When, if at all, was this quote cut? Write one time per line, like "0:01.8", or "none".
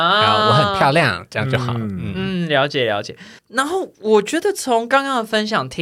0:03.4